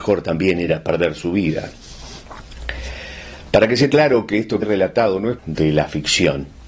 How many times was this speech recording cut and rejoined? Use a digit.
3